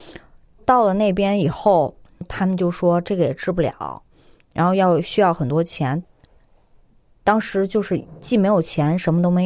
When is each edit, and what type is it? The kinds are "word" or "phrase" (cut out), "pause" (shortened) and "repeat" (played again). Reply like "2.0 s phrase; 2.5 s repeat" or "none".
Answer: none